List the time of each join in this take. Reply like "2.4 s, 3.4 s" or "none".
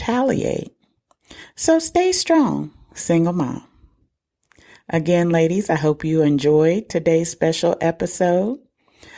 none